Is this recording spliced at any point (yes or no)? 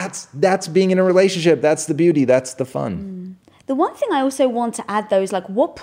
yes